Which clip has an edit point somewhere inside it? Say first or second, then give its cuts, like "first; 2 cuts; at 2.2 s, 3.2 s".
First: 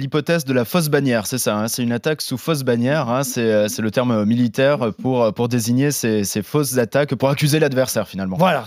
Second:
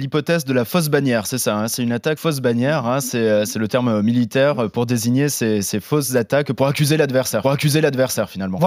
second; 3 cuts; at 2.2 s, 4.7 s, 7.4 s